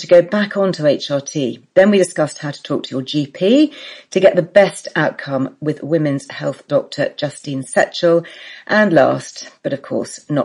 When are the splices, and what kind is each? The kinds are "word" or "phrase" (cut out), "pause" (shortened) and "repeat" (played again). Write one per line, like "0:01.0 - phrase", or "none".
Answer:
none